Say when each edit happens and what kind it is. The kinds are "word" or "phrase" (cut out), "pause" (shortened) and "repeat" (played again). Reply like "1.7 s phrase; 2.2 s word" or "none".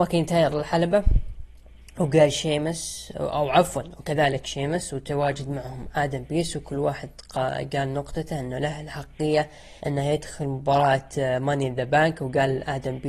9.8 s pause